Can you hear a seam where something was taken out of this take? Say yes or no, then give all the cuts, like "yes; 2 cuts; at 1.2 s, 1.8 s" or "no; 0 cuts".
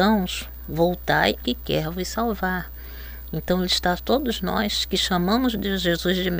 yes; 2 cuts; at 1.4 s, 4.0 s